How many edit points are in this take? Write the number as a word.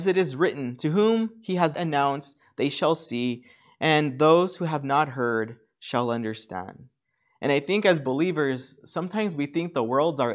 one